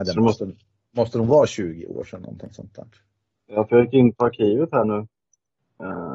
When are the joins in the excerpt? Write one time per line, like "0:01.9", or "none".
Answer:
none